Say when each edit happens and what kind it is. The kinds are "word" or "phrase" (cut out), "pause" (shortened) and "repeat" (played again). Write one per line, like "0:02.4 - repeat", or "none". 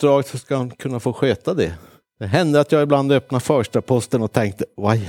none